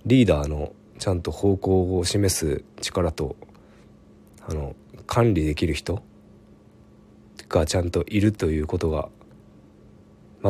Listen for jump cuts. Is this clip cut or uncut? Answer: uncut